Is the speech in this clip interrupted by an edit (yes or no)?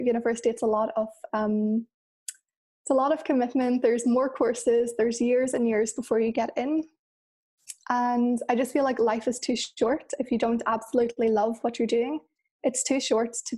no